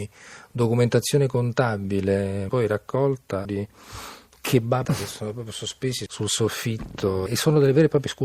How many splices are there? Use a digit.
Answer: 5